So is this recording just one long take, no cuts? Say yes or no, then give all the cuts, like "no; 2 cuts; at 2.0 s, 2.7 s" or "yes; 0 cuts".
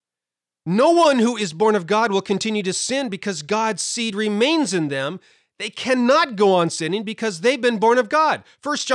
yes; 0 cuts